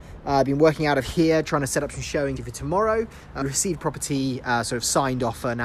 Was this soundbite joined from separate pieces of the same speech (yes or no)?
yes